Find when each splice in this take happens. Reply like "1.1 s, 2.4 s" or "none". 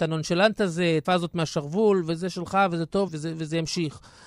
1.0 s, 3.1 s